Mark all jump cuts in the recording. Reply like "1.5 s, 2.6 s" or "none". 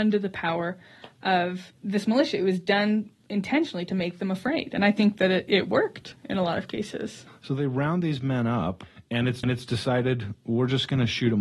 9.4 s